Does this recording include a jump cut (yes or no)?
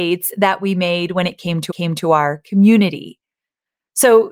yes